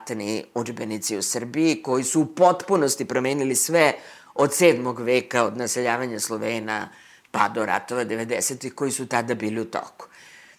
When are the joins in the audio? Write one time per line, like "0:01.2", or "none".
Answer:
none